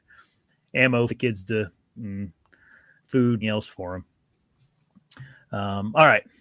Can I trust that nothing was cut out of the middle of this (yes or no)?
no